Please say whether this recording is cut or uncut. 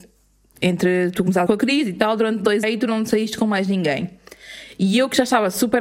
cut